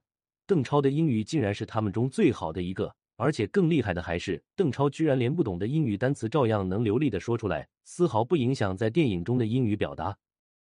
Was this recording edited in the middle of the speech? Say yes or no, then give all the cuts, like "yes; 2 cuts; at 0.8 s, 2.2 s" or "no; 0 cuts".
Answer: yes; 3 cuts; at 3.1 s, 4.5 s, 7.7 s